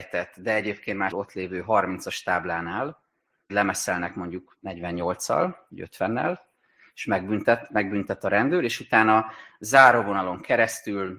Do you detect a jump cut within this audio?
yes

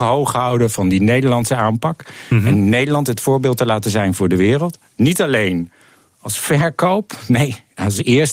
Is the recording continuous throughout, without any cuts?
yes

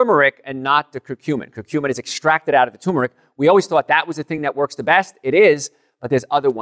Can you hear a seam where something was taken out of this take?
no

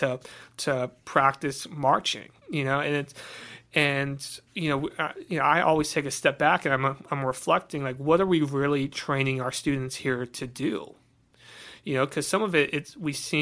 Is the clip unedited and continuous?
no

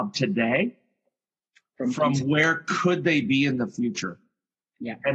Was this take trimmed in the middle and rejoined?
no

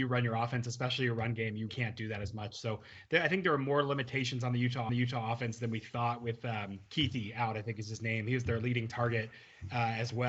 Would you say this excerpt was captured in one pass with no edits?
no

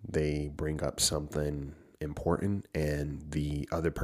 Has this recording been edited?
no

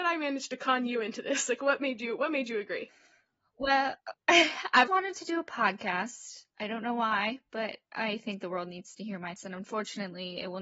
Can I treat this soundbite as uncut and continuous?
no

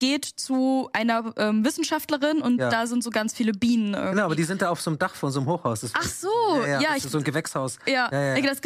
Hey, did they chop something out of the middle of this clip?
no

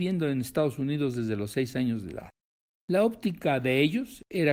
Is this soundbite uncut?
yes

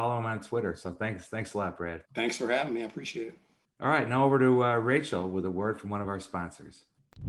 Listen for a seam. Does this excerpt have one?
yes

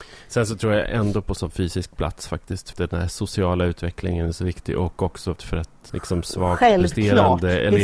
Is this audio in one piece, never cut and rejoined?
no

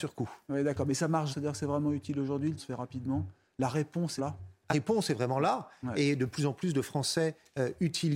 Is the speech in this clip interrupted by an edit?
yes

